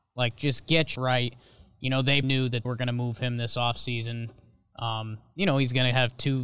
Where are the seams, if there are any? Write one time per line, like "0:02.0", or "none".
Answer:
0:00.9
0:02.2
0:02.6